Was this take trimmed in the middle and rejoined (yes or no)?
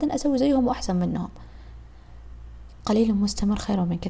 no